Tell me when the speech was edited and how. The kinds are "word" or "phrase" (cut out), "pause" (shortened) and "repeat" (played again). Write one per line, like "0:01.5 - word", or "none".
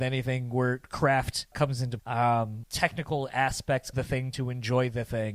0:01.5 - word
0:02.0 - word
0:02.6 - phrase
0:03.9 - word

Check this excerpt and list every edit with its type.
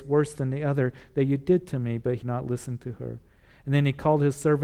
0:02.2 - word

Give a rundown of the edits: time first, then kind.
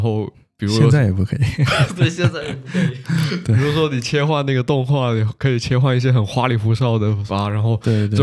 0:07.3 - phrase

